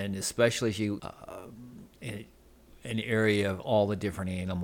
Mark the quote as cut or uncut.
cut